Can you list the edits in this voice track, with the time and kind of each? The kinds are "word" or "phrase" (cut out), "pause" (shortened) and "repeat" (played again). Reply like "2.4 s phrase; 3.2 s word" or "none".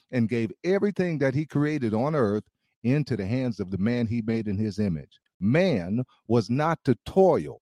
none

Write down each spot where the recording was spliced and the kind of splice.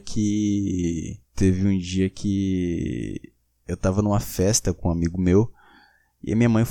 1.3 s pause

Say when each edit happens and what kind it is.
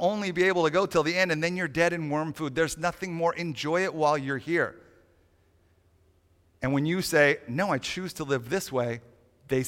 none

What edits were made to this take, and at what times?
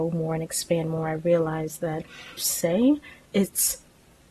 2.4 s phrase

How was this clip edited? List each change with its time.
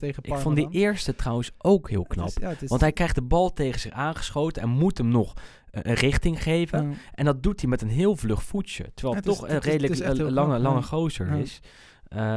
none

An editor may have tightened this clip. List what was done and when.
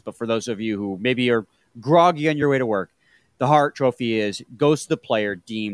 none

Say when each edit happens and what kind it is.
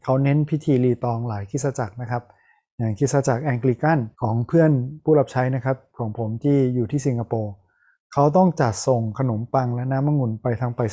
4.1 s pause

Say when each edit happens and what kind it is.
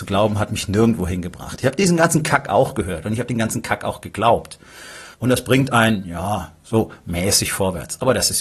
5.1 s pause

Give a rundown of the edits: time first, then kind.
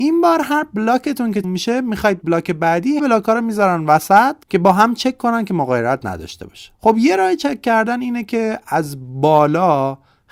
1.4 s word; 2.2 s word; 3.0 s word; 4.4 s pause; 6.7 s pause

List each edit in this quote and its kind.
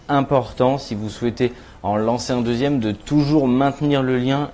none

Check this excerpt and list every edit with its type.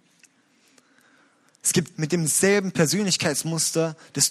1.9 s word

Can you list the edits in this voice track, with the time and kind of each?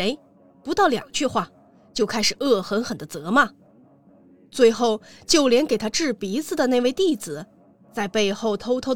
none

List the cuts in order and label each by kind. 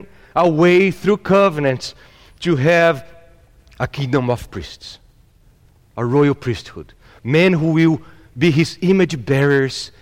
none

